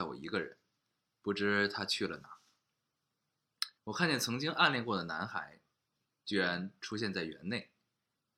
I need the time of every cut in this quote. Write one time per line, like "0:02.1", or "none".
0:03.8